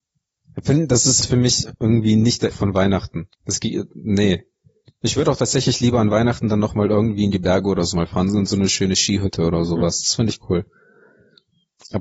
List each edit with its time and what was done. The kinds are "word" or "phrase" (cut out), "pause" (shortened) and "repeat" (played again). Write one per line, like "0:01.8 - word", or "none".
0:01.2 - word
0:02.5 - word
0:03.3 - pause
0:04.5 - pause